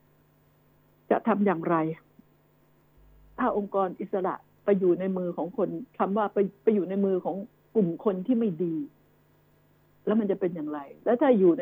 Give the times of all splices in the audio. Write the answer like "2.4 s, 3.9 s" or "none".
3.0 s, 5.9 s